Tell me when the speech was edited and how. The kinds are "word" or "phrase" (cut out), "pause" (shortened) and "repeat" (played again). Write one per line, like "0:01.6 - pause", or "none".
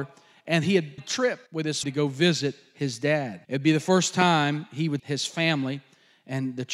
0:01.0 - word
0:01.5 - pause
0:01.8 - word
0:03.4 - pause
0:05.0 - word